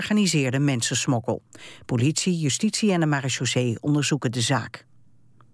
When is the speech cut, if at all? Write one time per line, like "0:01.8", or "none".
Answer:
none